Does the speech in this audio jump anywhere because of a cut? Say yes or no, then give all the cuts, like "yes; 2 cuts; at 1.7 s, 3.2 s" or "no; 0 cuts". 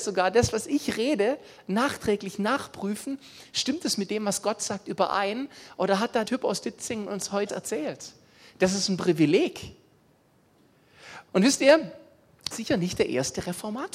yes; 4 cuts; at 6.3 s, 7.5 s, 11.3 s, 12.5 s